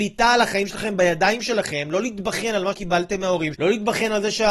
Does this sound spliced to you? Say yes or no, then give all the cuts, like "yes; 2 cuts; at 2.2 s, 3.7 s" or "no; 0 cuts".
yes; 2 cuts; at 2.7 s, 3.5 s